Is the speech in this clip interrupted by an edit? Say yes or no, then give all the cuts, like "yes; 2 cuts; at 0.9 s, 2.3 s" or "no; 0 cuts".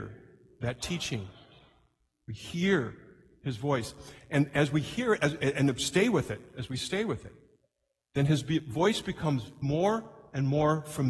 no; 0 cuts